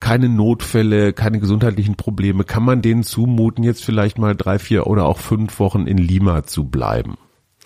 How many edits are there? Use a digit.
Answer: 0